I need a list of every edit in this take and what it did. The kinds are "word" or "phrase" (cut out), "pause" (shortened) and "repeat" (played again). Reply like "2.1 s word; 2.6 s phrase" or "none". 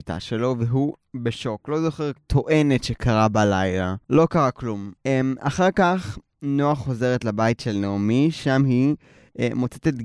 2.2 s phrase; 4.0 s pause; 5.0 s pause